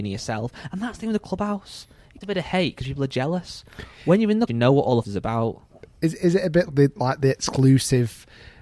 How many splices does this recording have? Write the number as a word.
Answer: four